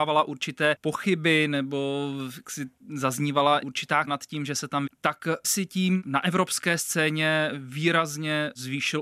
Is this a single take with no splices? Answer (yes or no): no